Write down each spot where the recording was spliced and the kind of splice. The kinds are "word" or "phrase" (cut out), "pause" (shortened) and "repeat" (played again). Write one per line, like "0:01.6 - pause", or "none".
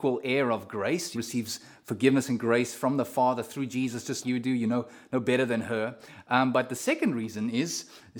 0:01.1 - phrase
0:04.2 - word

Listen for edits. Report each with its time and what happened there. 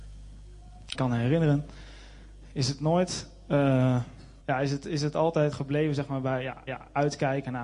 0:00.9 - phrase
0:04.4 - pause
0:05.5 - word
0:06.7 - repeat

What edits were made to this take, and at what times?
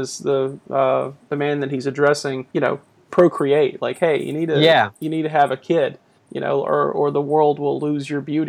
0:02.5 - pause
0:06.2 - pause

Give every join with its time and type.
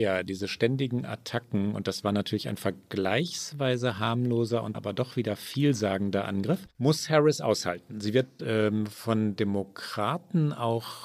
0:04.7 - word
0:06.7 - pause
0:08.4 - phrase

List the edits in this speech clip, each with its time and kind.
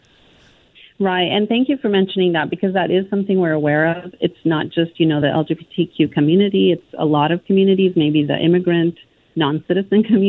none

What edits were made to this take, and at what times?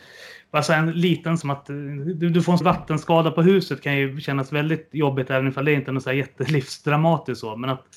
0:01.4 - word
0:02.6 - word

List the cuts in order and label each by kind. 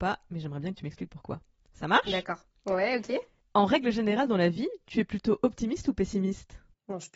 none

